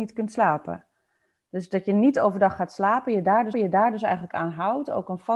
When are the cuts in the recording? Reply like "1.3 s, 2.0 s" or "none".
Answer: 3.5 s